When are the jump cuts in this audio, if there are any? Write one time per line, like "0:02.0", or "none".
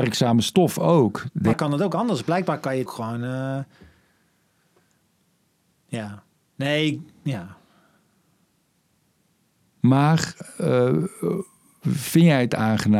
0:01.5
0:02.9